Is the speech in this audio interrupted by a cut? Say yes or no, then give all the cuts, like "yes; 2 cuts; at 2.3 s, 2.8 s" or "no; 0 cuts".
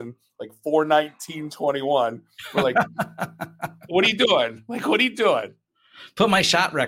no; 0 cuts